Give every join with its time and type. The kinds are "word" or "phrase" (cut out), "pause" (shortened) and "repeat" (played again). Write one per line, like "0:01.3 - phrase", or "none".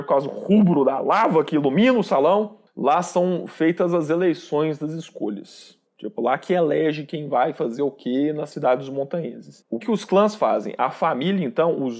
0:05.8 - pause
0:09.8 - word